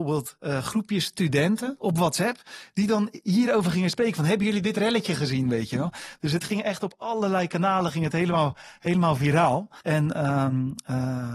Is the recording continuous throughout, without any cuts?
no; 1 cut; at 9.8 s

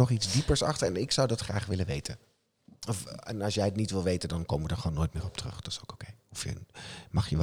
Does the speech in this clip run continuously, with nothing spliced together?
yes; 0 cuts

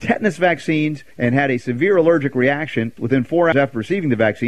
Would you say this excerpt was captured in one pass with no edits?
no; 3 cuts; at 1.1 s, 3.0 s, 3.5 s

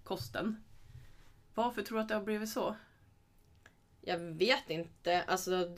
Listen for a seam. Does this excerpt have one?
no; 0 cuts

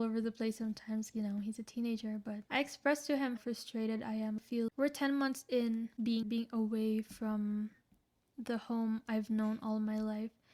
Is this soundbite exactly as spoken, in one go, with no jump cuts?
no; 6 cuts; at 1.1 s, 2.5 s, 3.4 s, 4.4 s, 4.7 s, 6.2 s

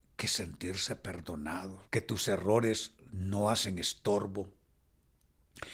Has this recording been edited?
yes; 1 cut; at 1.9 s

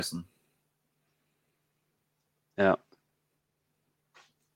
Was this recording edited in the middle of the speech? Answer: no; 0 cuts

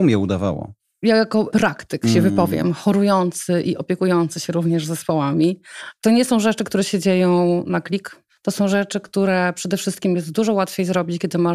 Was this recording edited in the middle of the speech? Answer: no; 0 cuts

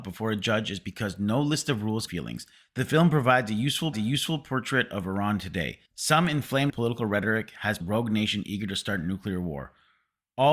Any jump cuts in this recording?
yes; 6 cuts; at 2.1 s, 2.5 s, 3.9 s, 5.9 s, 6.7 s, 7.8 s

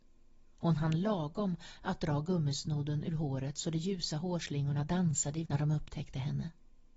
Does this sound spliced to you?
yes; 1 cut; at 5.5 s

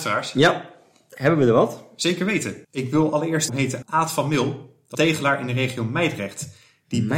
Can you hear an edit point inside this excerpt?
yes; 4 cuts; at 2.6 s, 3.5 s, 3.8 s, 4.9 s

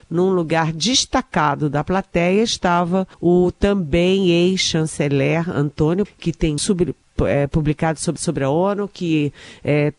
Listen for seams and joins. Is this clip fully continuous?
no; 4 cuts; at 3.1 s, 6.0 s, 6.6 s, 8.2 s

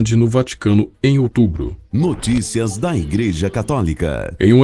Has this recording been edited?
no; 0 cuts

